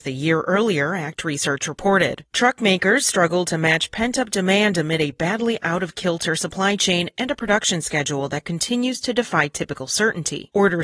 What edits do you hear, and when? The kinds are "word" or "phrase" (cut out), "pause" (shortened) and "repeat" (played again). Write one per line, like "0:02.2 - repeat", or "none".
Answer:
none

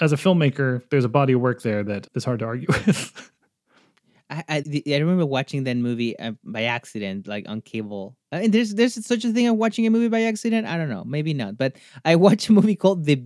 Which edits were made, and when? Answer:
0:02.1 - word
0:04.6 - word
0:08.2 - pause

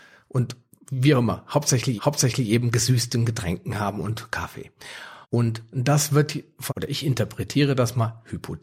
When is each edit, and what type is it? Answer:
0:02.0 - repeat
0:05.2 - pause
0:06.7 - phrase

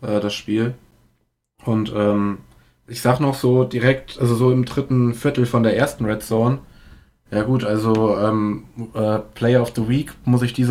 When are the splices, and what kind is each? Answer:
none

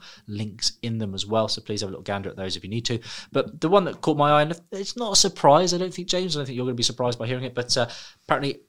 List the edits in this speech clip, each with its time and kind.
none

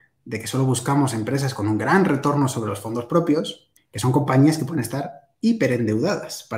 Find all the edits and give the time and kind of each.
0:03.8 - pause

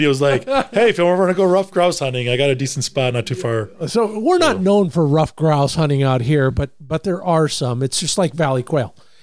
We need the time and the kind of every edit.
none

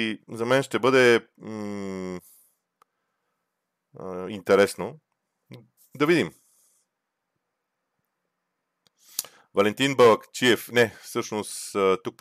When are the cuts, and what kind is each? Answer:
0:05.8 - pause

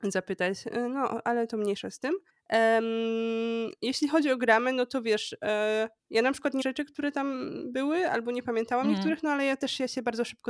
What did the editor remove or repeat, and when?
0:02.3 - pause
0:06.0 - pause
0:06.6 - phrase

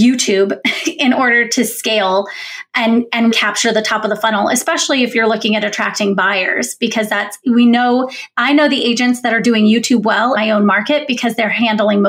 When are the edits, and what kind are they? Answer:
0:03.3 - word
0:10.4 - word

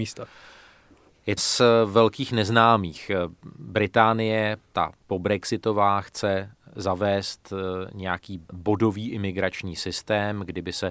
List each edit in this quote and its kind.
0:01.4 - phrase
0:05.0 - pause
0:08.4 - pause

